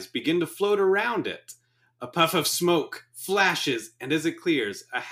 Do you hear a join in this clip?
no; 0 cuts

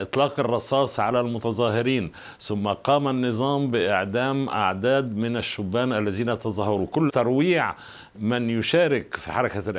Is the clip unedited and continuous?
no; 1 cut; at 7.1 s

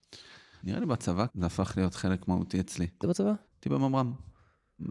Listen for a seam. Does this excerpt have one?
yes; 3 cuts; at 1.3 s, 3.0 s, 3.5 s

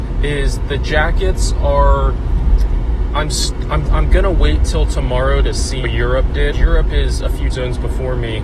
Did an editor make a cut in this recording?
yes; 4 cuts; at 3.9 s, 5.8 s, 6.5 s, 7.5 s

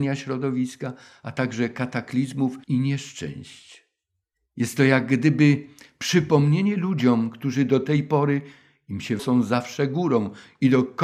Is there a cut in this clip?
yes; 2 cuts; at 2.6 s, 9.2 s

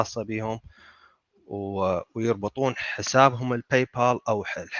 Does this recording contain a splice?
no; 0 cuts

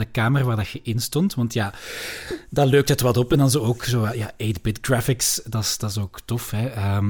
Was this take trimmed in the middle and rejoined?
no; 0 cuts

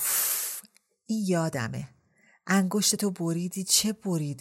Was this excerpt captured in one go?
yes; 0 cuts

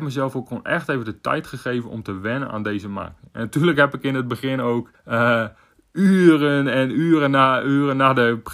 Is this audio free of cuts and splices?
no; 1 cut; at 4.9 s

